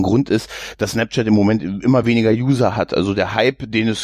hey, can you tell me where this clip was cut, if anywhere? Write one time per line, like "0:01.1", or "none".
none